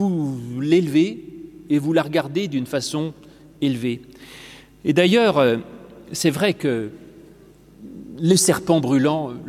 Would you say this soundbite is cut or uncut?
uncut